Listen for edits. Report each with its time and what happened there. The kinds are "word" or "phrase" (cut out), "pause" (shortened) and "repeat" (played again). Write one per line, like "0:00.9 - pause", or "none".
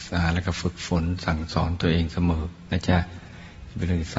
none